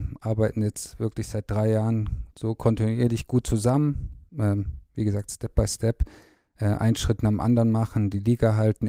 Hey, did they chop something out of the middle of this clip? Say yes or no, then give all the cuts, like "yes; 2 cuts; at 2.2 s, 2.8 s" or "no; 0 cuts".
yes; 1 cut; at 4.3 s